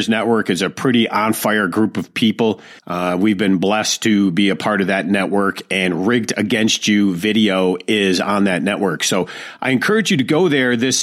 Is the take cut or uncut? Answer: cut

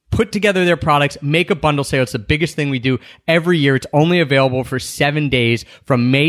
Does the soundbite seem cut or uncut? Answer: uncut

